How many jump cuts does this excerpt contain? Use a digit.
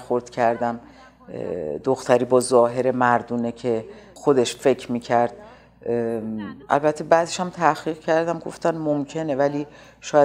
1